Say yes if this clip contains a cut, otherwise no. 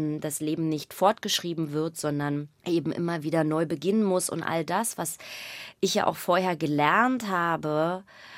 yes